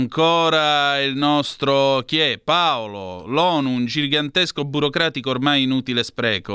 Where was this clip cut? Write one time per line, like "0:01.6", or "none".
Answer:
none

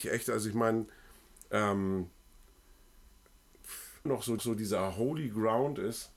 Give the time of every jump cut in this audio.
0:04.1
0:04.4

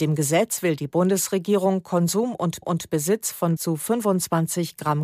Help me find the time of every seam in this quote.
0:02.6
0:03.6

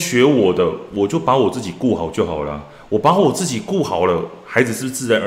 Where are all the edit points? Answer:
none

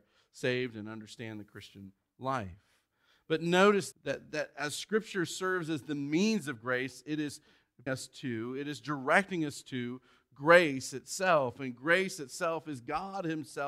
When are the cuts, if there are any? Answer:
0:03.9
0:07.9

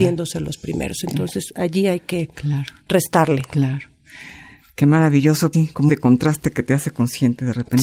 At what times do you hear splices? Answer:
0:05.5
0:05.9

